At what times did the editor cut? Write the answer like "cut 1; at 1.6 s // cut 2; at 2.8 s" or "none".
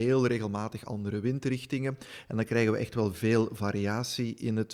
none